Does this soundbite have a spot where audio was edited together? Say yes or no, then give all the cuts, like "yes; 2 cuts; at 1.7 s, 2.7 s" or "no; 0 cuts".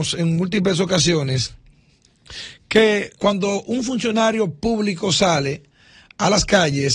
yes; 1 cut; at 3.2 s